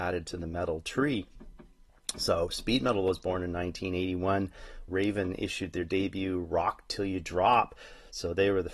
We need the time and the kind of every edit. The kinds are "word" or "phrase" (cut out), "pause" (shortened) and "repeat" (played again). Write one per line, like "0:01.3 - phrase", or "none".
0:04.9 - word